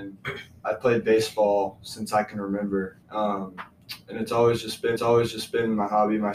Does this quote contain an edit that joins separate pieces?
yes; 2 cuts; at 3.0 s, 5.0 s

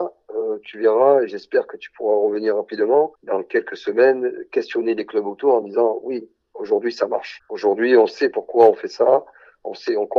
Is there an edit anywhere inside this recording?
no; 0 cuts

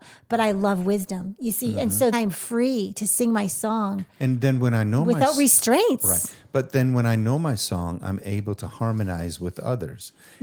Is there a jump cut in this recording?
yes; 1 cut; at 2.1 s

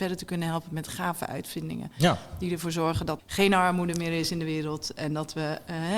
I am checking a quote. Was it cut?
yes; 1 cut; at 3.2 s

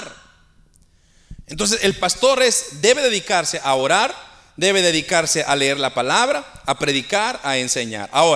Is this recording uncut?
yes; 0 cuts

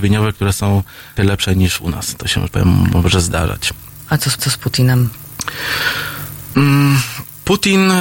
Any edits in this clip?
yes; 3 cuts; at 1.2 s, 2.5 s, 4.4 s

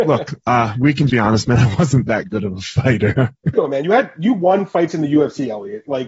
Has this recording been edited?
yes; 2 cuts; at 1.1 s, 3.5 s

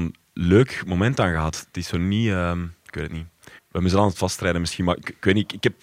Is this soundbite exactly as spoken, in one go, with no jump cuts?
no; 1 cut; at 3.6 s

